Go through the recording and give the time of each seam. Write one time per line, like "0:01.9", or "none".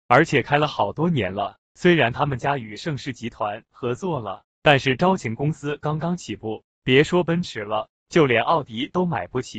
0:01.6